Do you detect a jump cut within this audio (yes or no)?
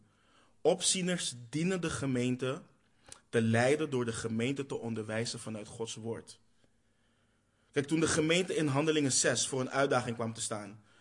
no